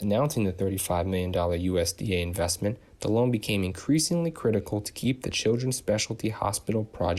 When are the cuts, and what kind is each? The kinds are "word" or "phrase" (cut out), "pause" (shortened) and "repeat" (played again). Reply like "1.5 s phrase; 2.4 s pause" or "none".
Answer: none